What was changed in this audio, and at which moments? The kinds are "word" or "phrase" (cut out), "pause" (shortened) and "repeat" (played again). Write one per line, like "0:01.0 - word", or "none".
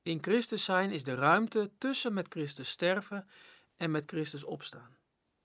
none